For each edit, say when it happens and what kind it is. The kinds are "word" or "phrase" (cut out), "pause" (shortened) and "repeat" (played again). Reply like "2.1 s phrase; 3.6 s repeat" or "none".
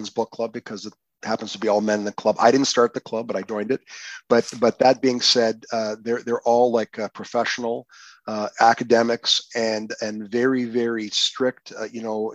none